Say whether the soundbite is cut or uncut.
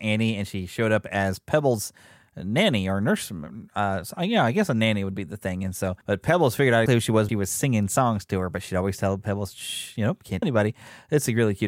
cut